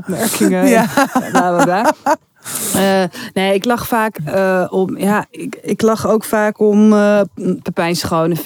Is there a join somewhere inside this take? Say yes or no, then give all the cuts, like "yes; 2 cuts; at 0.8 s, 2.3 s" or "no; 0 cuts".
no; 0 cuts